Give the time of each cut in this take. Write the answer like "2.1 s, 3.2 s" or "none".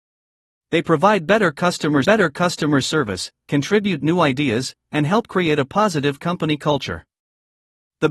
2.0 s